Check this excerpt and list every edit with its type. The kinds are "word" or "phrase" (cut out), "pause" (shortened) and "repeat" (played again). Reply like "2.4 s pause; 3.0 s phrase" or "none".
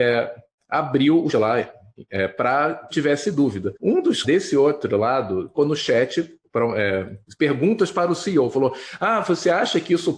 1.3 s word; 2.9 s word; 3.8 s pause; 4.2 s word; 5.6 s phrase